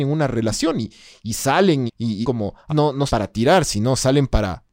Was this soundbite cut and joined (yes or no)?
yes